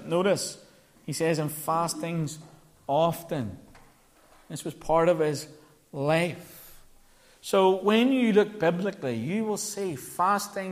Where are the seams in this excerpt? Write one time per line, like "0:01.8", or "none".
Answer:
none